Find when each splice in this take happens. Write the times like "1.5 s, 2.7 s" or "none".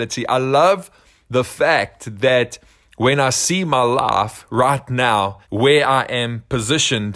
5.4 s